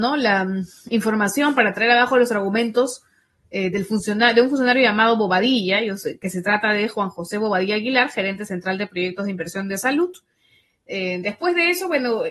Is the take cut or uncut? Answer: uncut